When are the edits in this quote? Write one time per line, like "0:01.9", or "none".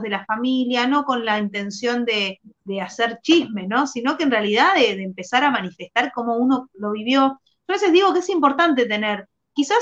none